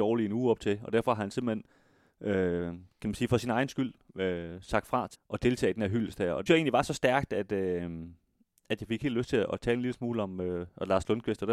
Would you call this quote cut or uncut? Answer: cut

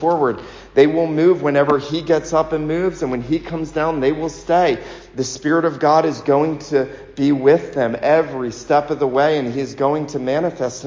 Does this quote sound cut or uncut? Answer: uncut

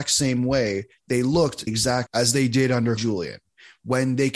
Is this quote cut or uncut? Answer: cut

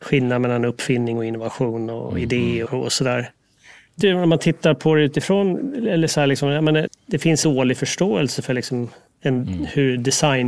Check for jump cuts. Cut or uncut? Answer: cut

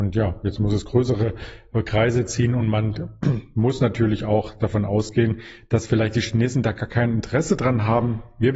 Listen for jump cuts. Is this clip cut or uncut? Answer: uncut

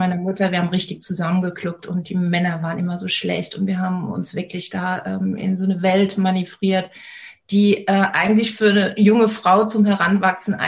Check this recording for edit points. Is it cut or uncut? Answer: uncut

